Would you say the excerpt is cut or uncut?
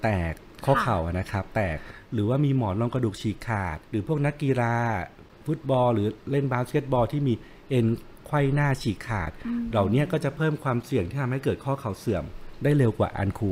cut